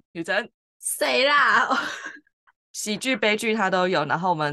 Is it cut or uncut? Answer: uncut